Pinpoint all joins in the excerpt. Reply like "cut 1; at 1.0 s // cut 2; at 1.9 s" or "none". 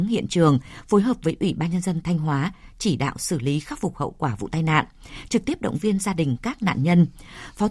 cut 1; at 2.0 s